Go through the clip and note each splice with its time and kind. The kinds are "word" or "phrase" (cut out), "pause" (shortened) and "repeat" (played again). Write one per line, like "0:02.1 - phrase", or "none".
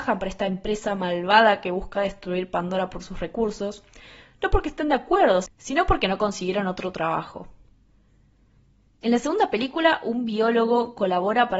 none